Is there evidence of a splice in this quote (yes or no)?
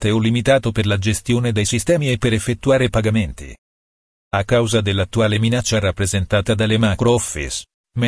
no